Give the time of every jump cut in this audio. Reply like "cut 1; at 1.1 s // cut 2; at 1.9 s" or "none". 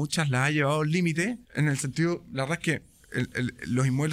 cut 1; at 1.4 s